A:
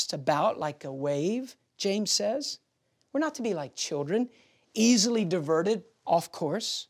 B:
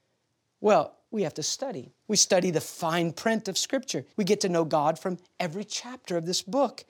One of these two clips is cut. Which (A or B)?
B